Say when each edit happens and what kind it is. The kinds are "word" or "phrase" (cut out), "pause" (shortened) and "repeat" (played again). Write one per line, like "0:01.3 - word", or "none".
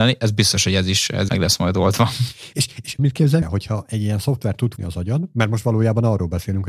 0:01.3 - word
0:03.0 - word
0:03.4 - word
0:04.8 - word